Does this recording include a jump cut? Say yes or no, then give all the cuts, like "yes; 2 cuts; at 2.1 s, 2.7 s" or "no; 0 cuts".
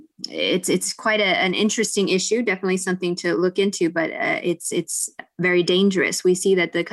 no; 0 cuts